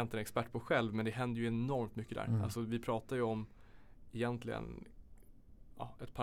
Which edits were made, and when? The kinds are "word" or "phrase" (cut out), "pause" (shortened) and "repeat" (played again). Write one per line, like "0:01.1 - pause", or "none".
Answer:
none